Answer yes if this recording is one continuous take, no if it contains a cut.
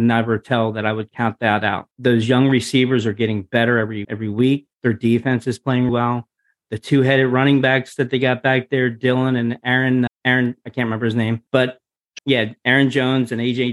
no